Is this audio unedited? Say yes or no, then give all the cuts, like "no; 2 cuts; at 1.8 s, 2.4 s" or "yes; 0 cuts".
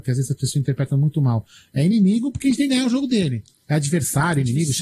yes; 0 cuts